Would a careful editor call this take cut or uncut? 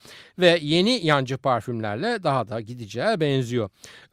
uncut